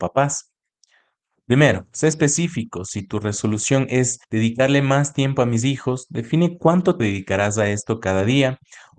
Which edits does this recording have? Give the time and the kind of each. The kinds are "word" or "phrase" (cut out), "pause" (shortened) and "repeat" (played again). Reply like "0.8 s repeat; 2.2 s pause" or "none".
4.2 s pause; 7.0 s word